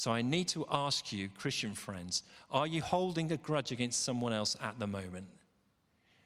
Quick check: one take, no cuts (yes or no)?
yes